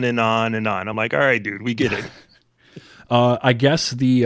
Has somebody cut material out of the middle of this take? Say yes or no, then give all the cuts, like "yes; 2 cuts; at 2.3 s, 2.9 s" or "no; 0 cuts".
no; 0 cuts